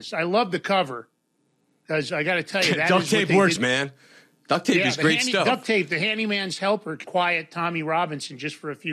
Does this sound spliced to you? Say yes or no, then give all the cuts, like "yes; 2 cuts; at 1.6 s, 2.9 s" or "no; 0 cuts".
yes; 2 cuts; at 3.6 s, 7.0 s